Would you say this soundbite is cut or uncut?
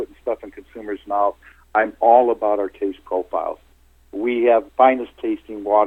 cut